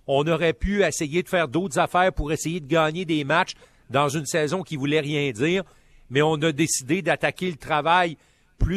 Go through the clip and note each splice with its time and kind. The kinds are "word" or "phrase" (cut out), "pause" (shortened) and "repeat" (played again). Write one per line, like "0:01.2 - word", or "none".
none